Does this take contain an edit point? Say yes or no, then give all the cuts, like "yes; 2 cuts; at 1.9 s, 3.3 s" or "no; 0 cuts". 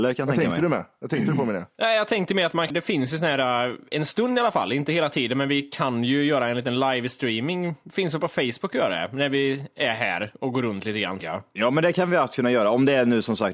yes; 2 cuts; at 2.7 s, 11.2 s